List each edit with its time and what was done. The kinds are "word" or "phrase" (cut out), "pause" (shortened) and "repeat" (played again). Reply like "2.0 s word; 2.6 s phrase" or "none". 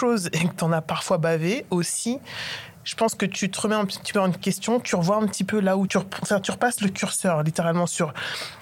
5.9 s word